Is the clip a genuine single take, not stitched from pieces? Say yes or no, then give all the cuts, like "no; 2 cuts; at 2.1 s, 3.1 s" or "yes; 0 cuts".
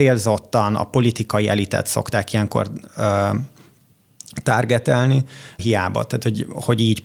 no; 1 cut; at 5.6 s